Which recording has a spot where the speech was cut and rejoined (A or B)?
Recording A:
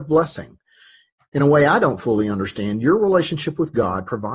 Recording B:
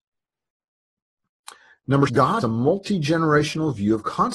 B